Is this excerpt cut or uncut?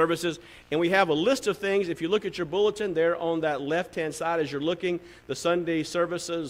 uncut